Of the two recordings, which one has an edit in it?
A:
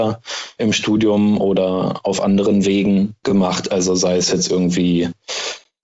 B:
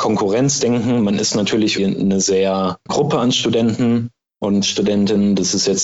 B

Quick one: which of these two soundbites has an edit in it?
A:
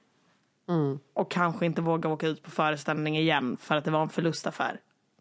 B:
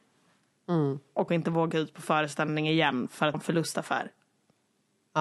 B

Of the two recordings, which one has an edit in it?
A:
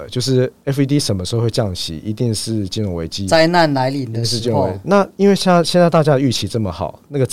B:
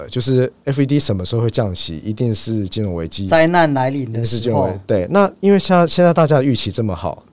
A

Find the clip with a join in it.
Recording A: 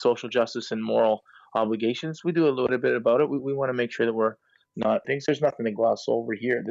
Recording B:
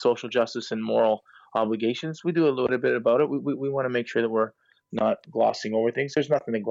A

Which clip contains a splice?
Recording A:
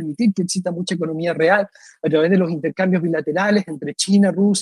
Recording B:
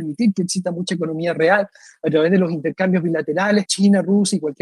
B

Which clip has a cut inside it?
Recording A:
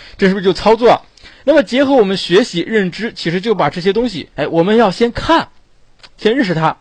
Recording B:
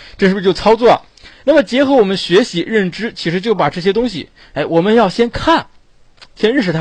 A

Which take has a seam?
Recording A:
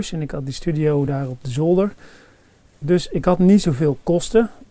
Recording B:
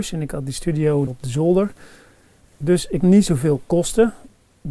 B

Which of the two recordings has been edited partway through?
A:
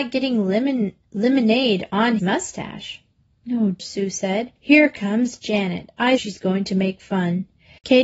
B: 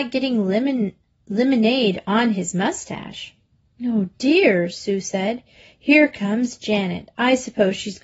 A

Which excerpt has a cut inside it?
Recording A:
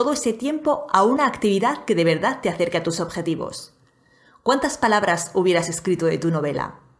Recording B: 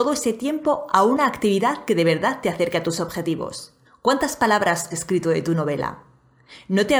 B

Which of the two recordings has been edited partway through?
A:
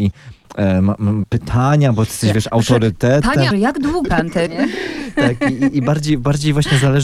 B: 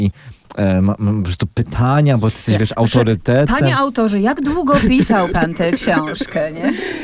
A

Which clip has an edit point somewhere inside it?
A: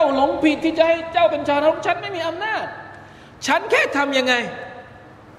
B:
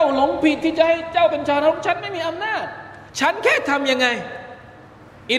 B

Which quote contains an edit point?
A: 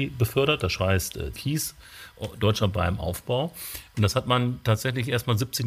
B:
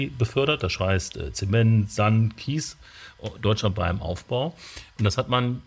A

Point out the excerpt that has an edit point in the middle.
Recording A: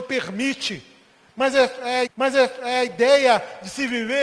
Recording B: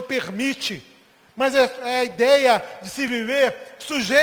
A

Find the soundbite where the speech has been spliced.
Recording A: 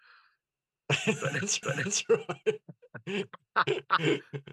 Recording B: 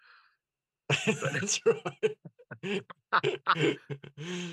A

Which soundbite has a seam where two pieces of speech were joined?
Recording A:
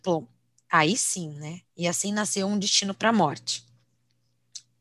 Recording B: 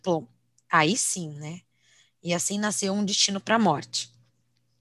A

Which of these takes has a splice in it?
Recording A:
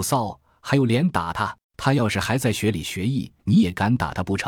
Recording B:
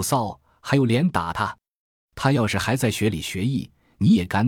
A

